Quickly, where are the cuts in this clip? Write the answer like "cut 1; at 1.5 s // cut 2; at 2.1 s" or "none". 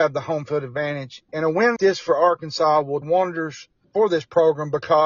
cut 1; at 1.3 s // cut 2; at 1.8 s // cut 3; at 3.0 s // cut 4; at 3.8 s